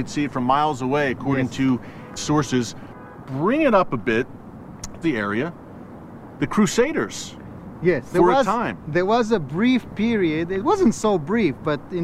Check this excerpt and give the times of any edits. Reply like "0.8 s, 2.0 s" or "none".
2.2 s, 5.0 s